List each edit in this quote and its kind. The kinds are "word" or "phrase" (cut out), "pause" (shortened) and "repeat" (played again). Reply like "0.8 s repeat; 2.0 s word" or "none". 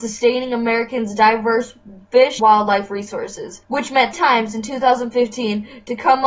2.4 s word; 4.1 s word